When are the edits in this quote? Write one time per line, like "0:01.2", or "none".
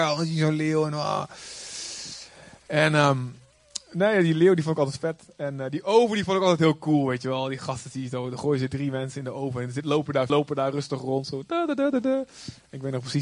0:10.3